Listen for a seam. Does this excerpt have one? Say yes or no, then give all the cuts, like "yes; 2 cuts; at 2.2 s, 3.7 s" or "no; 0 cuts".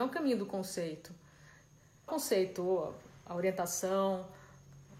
yes; 1 cut; at 2.1 s